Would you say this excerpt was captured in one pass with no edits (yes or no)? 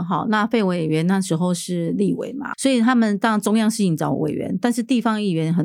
no